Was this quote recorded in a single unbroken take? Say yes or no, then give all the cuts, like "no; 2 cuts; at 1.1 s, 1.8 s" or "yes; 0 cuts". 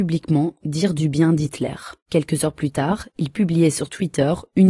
no; 1 cut; at 2.0 s